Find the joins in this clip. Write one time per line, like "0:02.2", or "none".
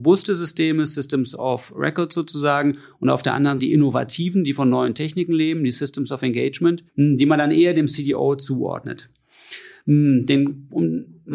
0:03.6
0:06.9